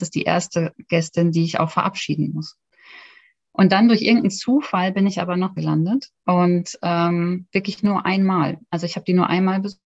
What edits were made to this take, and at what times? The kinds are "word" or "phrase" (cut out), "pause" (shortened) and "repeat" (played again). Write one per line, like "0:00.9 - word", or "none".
0:05.6 - phrase
0:06.2 - pause